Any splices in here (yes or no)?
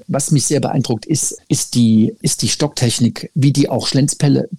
yes